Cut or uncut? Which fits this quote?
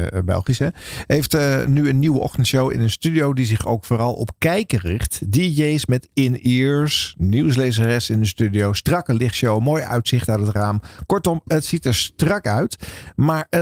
uncut